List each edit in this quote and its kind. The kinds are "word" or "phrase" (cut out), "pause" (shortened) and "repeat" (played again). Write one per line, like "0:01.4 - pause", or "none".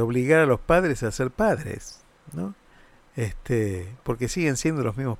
none